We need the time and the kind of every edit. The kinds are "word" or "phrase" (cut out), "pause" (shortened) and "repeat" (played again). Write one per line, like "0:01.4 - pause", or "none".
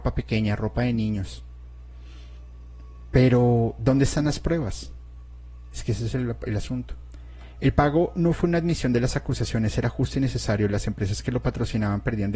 none